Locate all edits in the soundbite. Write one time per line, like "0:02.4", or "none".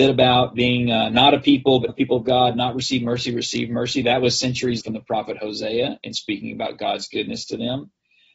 0:01.9
0:04.8